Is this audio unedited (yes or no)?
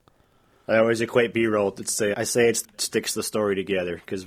no